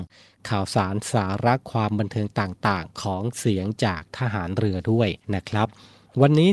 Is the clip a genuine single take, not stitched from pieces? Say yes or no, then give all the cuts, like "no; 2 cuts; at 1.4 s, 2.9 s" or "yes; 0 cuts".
no; 1 cut; at 5.2 s